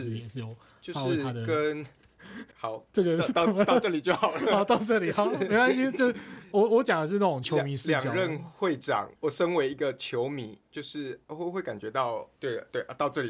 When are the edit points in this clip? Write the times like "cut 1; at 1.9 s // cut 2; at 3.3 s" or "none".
cut 1; at 2.5 s // cut 2; at 9.2 s // cut 3; at 10.7 s // cut 4; at 11.2 s // cut 5; at 12.3 s